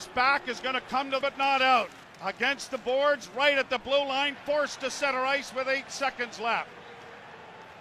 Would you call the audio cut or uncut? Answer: cut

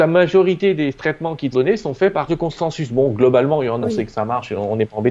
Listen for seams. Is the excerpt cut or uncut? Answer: cut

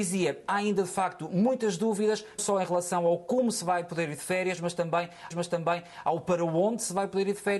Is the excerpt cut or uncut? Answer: cut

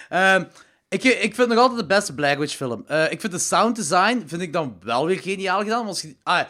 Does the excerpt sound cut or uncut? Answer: uncut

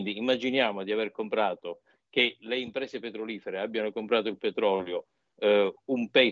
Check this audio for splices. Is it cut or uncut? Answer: uncut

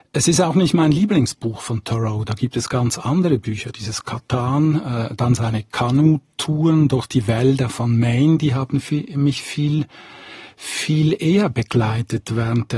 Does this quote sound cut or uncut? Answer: uncut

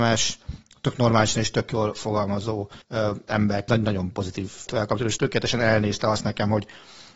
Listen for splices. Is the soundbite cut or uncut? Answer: cut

